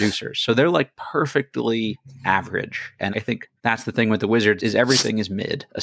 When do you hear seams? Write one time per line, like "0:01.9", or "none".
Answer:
0:03.1
0:03.6
0:04.6